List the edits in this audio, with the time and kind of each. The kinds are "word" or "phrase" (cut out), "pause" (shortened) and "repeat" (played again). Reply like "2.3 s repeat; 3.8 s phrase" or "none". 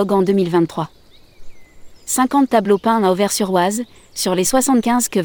none